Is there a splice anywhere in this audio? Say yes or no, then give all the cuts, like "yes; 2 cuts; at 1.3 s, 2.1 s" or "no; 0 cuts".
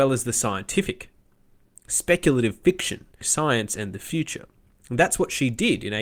yes; 1 cut; at 3.2 s